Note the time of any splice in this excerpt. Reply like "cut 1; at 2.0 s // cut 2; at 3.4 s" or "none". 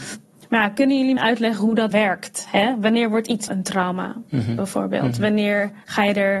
cut 1; at 1.2 s // cut 2; at 1.9 s // cut 3; at 3.5 s

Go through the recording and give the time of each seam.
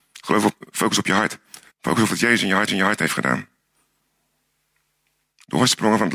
cut 1; at 1.7 s // cut 2; at 2.7 s

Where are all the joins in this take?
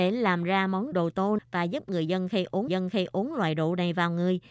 cut 1; at 0.9 s // cut 2; at 1.4 s // cut 3; at 2.7 s

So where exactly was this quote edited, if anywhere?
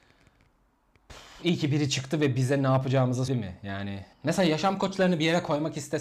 cut 1; at 3.3 s // cut 2; at 4.1 s

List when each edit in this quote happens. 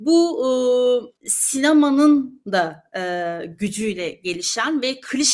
cut 1; at 1.2 s

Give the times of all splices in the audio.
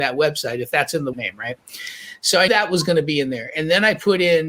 cut 1; at 1.1 s // cut 2; at 2.5 s

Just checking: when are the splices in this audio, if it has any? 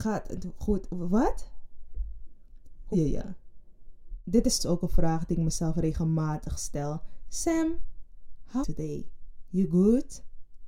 cut 1; at 2.9 s // cut 2; at 4.6 s // cut 3; at 8.6 s

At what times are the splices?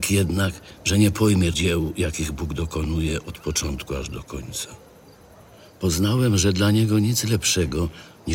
cut 1; at 1.5 s

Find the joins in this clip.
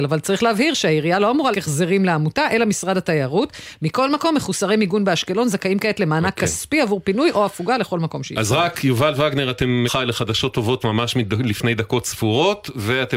cut 1; at 1.5 s // cut 2; at 9.9 s // cut 3; at 10.8 s

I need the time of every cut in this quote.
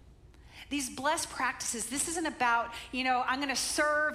none

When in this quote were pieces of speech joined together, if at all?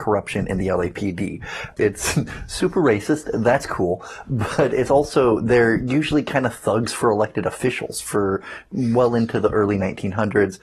none

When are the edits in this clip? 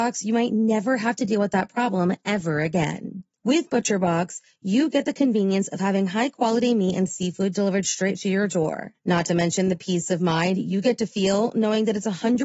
none

